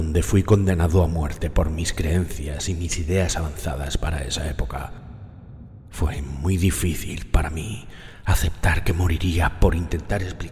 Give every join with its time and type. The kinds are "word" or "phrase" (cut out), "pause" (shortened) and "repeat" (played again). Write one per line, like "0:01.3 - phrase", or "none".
none